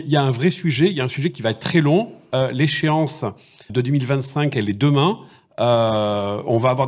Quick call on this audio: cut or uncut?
cut